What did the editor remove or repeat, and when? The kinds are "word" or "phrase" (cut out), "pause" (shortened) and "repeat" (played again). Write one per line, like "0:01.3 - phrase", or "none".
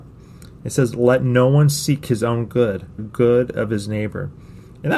0:03.0 - phrase